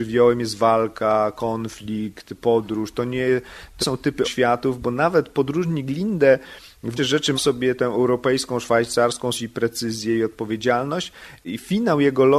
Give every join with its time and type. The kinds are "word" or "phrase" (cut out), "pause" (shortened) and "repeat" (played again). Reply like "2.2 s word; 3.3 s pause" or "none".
3.8 s word; 4.2 s word; 7.0 s word; 7.4 s word; 7.8 s word; 9.3 s word

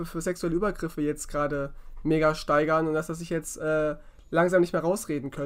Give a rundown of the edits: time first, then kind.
none

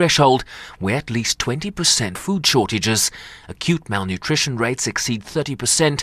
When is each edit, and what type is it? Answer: 2.2 s phrase

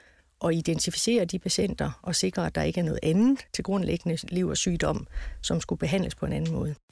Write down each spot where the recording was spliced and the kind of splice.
3.5 s pause

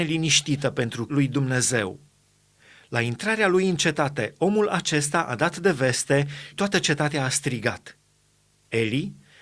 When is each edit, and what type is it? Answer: 1.1 s word; 6.5 s word

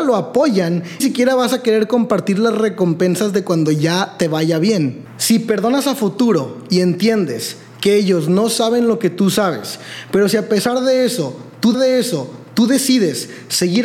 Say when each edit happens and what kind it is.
1.0 s word; 11.7 s repeat

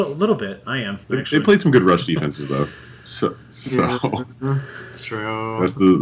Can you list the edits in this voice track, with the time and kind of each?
1.0 s pause

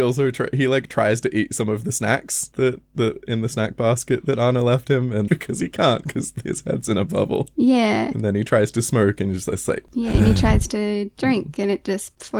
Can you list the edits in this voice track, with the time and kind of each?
5.3 s phrase

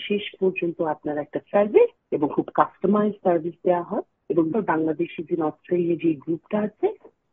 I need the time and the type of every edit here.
1.4 s word; 4.5 s word

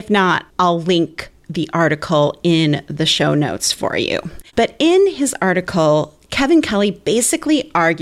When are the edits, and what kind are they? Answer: 4.5 s pause

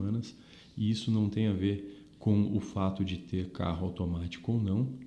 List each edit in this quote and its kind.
none

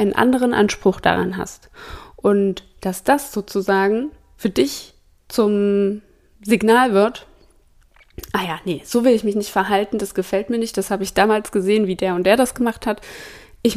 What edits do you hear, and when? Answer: none

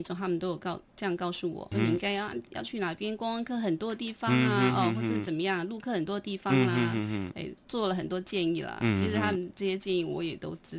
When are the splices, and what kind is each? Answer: 1.7 s word; 7.6 s word

